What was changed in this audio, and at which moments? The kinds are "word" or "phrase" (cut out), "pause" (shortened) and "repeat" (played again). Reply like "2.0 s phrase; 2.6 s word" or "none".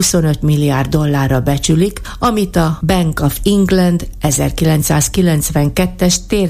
none